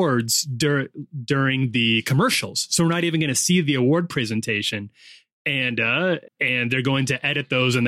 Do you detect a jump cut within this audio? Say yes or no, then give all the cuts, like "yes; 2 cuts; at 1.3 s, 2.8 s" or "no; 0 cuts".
yes; 1 cut; at 6.3 s